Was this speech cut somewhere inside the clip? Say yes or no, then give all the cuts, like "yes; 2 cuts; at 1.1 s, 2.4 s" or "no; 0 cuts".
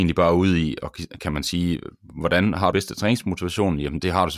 yes; 2 cuts; at 1.2 s, 2.7 s